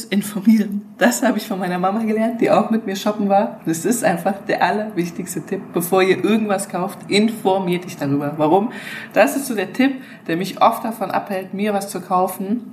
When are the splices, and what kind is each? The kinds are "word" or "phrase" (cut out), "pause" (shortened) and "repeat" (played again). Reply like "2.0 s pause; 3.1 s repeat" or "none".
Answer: none